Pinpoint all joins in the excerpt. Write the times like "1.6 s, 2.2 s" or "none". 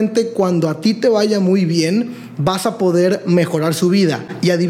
none